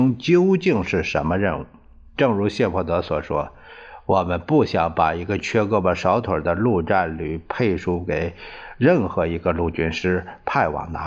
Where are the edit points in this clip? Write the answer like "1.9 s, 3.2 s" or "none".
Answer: none